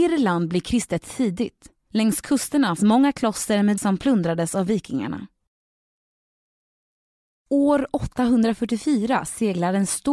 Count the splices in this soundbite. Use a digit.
2